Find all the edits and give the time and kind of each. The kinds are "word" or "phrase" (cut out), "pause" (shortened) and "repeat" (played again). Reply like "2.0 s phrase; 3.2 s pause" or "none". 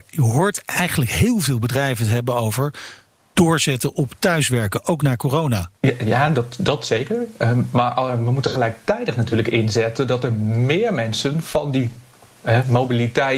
none